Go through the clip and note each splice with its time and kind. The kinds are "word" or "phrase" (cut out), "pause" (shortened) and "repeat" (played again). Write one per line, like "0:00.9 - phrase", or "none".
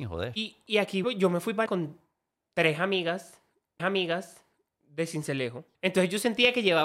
0:01.0 - word
0:01.7 - word
0:03.8 - repeat
0:05.7 - pause